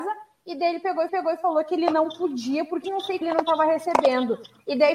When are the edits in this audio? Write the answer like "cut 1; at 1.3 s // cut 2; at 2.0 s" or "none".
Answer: cut 1; at 1.1 s // cut 2; at 2.8 s // cut 3; at 3.2 s